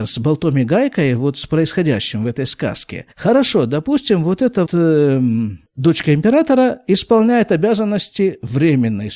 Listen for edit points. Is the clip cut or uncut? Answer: cut